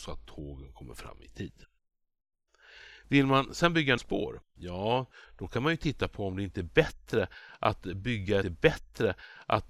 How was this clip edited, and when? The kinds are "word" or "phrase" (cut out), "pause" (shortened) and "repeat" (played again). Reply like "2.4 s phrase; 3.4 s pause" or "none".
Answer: 4.0 s word; 8.4 s repeat